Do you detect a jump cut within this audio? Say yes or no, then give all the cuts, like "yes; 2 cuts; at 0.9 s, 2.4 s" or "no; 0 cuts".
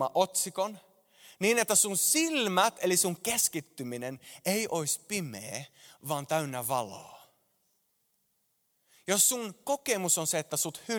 no; 0 cuts